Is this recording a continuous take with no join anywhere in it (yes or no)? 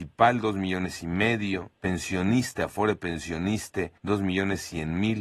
no